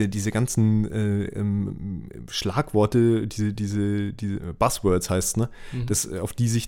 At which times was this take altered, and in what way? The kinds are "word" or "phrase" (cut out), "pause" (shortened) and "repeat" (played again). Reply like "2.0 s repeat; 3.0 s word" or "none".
none